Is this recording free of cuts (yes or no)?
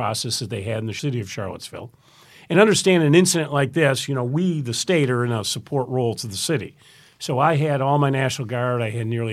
yes